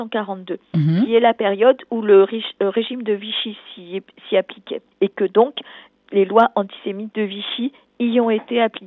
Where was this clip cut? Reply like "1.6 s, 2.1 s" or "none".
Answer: 4.9 s